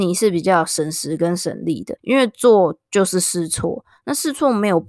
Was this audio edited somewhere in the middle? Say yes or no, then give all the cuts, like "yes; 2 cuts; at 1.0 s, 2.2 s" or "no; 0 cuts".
yes; 1 cut; at 2.0 s